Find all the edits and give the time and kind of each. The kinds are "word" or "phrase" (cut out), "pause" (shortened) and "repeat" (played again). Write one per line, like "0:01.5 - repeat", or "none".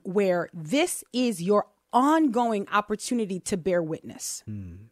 none

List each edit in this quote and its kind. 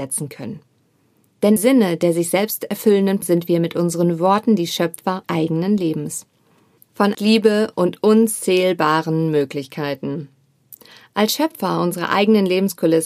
0:01.6 - word
0:03.2 - word
0:05.2 - word
0:07.1 - word

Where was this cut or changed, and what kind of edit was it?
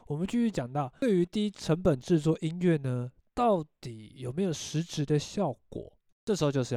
none

